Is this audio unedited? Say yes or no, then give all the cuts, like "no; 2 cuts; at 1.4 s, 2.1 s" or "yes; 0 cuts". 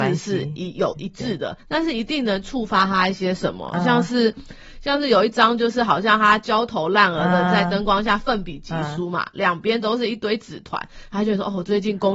no; 1 cut; at 1.6 s